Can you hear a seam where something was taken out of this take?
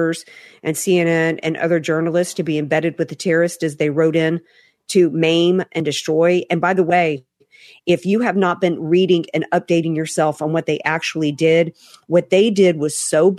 no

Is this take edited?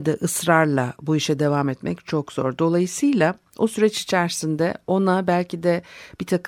no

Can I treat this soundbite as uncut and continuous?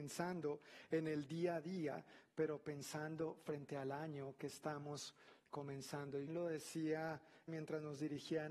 no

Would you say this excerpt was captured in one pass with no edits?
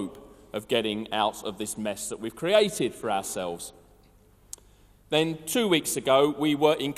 yes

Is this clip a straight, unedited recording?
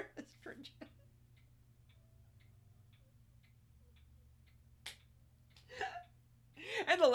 yes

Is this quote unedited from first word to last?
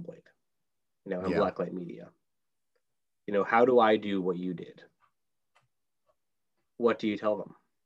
yes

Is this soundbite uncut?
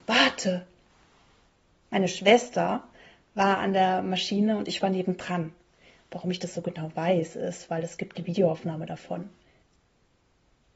yes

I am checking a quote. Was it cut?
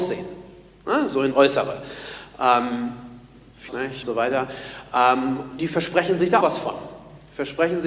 yes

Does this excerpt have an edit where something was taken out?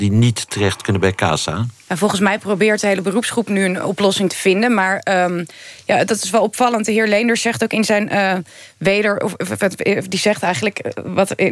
no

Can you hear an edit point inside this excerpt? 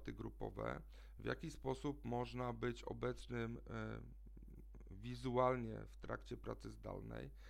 no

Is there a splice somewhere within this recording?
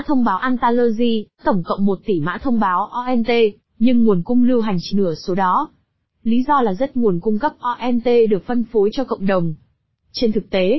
yes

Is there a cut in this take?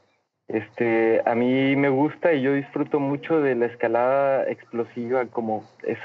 no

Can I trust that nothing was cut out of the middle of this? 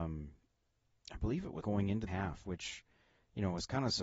no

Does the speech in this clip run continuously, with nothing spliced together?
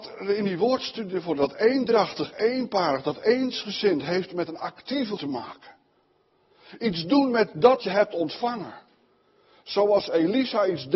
no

